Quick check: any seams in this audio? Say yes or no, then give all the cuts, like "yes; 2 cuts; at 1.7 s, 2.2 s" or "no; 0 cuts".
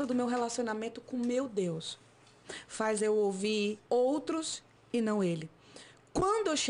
yes; 1 cut; at 3.8 s